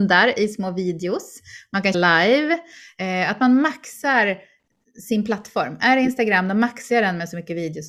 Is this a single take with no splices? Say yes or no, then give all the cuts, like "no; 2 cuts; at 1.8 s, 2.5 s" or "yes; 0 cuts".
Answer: no; 1 cut; at 1.9 s